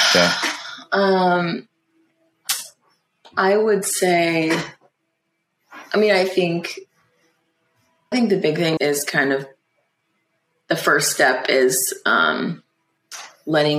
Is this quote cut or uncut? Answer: cut